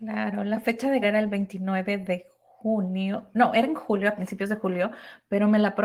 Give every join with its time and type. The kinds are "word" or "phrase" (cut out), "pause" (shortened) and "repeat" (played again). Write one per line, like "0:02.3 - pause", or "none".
0:01.0 - word